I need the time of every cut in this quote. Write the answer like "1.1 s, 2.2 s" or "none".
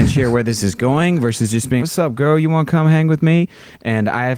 1.8 s